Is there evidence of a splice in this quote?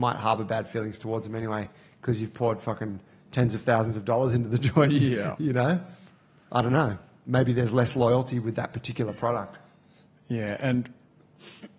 no; 0 cuts

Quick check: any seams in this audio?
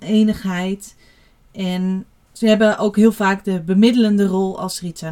no; 0 cuts

